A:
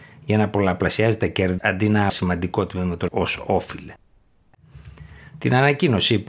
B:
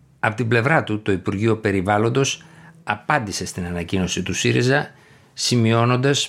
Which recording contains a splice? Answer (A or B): A